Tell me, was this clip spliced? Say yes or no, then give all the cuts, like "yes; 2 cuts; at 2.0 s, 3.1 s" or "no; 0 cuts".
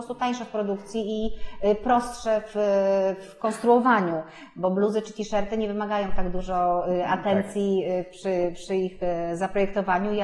no; 0 cuts